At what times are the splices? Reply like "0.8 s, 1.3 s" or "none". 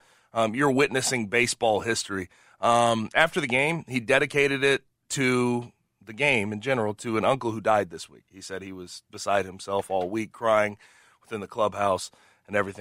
none